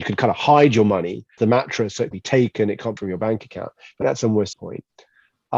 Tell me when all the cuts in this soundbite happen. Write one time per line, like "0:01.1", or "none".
0:01.4
0:02.1
0:03.0
0:04.0
0:04.5